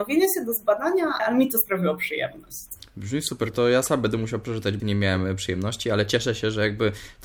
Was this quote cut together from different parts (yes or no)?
yes